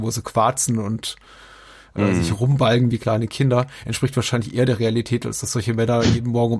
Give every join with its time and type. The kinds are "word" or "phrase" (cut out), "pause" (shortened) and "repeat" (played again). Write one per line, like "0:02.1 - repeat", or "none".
none